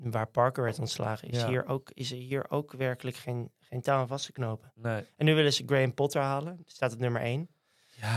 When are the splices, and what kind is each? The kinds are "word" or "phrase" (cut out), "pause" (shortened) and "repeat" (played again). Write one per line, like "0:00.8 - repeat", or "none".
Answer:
none